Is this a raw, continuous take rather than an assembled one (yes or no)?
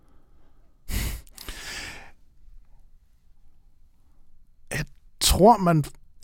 yes